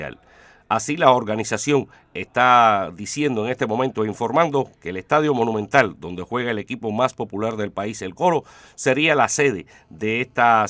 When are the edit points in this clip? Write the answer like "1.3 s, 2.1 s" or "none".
8.1 s